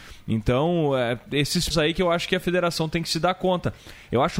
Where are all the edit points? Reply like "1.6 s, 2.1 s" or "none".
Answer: 1.7 s